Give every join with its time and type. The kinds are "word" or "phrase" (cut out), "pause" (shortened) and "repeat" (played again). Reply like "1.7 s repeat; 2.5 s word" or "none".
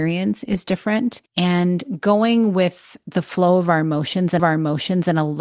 1.3 s pause; 4.4 s repeat